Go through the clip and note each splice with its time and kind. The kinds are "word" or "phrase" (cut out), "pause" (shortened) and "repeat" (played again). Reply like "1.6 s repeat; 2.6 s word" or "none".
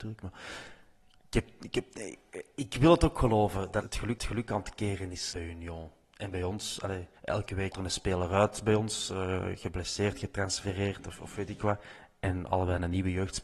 3.8 s word; 4.2 s repeat; 5.3 s word; 7.2 s pause; 7.7 s word